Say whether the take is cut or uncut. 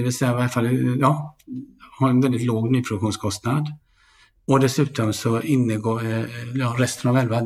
uncut